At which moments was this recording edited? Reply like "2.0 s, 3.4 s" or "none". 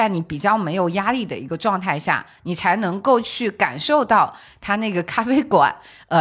none